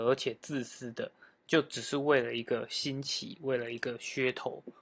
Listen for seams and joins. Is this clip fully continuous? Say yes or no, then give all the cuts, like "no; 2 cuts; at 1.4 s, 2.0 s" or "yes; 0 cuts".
yes; 0 cuts